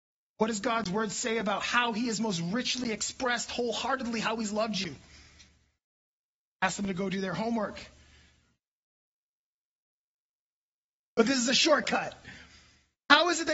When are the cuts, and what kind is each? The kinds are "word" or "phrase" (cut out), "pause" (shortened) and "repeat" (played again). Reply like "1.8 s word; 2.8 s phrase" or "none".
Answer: none